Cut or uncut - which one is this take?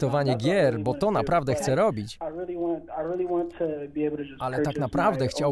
uncut